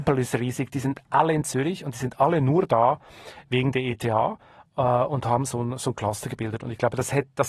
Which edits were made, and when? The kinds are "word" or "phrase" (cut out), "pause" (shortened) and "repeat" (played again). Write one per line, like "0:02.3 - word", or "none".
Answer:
none